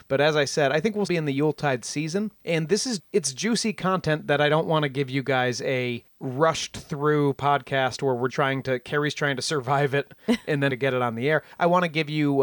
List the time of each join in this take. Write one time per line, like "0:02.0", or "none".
0:01.1
0:02.3
0:03.0
0:06.1
0:08.3
0:10.7